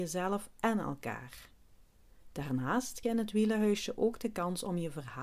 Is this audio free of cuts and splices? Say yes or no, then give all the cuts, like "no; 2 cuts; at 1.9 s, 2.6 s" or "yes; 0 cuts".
no; 1 cut; at 3.0 s